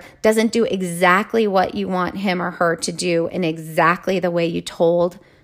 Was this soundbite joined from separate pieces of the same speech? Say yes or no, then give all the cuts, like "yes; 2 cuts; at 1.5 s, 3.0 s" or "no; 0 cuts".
no; 0 cuts